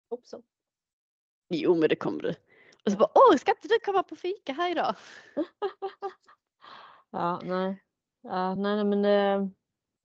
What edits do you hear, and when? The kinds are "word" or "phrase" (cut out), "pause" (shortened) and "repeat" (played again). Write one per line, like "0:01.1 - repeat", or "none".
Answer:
none